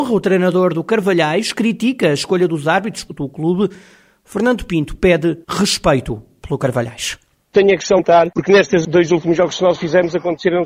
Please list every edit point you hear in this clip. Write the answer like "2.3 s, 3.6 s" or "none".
3.1 s, 5.4 s, 8.0 s